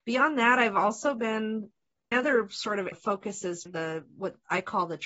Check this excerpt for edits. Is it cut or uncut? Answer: cut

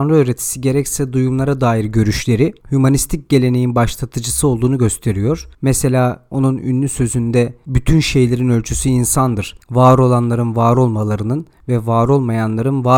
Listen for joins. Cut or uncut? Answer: cut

